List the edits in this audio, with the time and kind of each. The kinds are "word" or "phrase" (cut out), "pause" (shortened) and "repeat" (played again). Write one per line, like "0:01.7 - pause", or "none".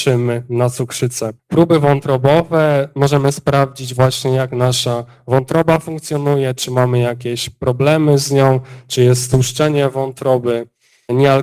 0:01.4 - pause